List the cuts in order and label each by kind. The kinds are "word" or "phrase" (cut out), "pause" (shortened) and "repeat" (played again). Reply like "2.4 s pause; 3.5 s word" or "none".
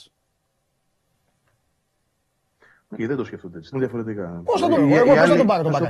2.9 s word; 3.7 s word; 4.8 s word